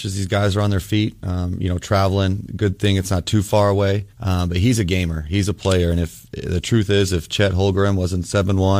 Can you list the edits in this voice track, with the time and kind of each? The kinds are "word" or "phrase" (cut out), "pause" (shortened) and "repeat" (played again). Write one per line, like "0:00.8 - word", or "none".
0:04.1 - pause